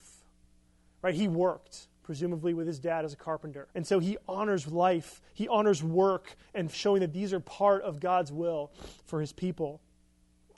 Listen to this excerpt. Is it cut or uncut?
cut